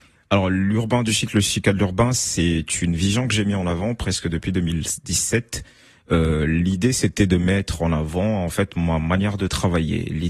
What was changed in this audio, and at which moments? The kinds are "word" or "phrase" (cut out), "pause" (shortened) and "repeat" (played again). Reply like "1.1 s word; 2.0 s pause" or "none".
none